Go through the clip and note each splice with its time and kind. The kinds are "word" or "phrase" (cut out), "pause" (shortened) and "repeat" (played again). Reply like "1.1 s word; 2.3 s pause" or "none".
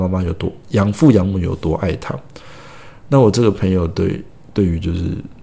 none